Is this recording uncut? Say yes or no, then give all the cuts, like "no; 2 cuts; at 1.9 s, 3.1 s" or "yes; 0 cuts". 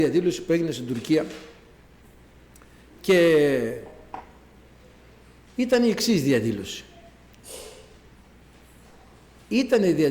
yes; 0 cuts